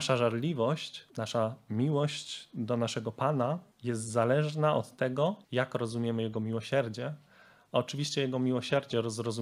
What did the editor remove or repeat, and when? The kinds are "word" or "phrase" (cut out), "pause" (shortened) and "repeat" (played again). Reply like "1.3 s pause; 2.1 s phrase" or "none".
1.1 s pause; 3.7 s pause; 5.4 s pause